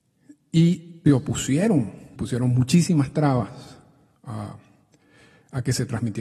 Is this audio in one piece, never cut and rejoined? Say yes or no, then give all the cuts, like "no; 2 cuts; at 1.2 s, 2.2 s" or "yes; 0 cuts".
no; 2 cuts; at 1.1 s, 2.2 s